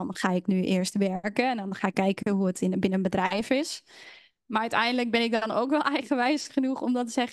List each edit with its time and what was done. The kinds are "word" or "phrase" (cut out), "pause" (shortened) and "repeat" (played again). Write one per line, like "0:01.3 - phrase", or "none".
none

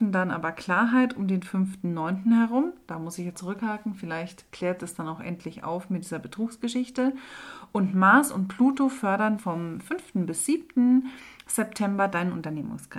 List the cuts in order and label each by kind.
0:03.3 - word
0:04.8 - word
0:09.4 - word

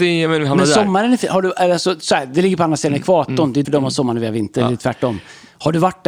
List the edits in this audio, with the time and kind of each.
0:03.6 - word

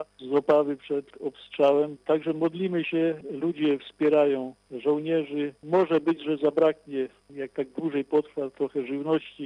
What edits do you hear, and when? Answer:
none

